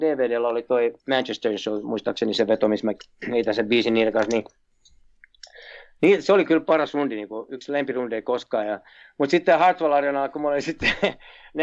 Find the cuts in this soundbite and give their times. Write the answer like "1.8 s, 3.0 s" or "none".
1.0 s